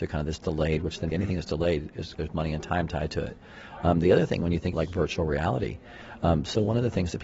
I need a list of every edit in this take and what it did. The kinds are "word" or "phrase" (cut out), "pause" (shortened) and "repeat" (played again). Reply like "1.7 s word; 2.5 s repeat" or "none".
1.1 s word; 2.1 s word; 4.7 s word